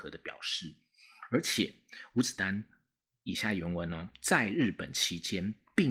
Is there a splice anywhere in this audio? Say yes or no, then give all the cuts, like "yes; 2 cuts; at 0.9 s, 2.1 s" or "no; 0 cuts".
no; 0 cuts